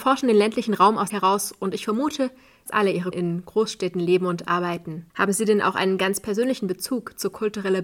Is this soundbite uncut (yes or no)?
no